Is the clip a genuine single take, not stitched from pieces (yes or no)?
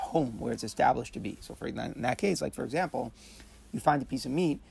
yes